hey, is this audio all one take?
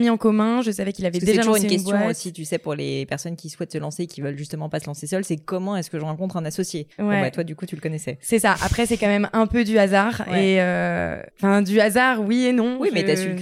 no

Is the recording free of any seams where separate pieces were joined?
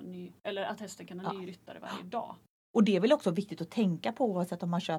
yes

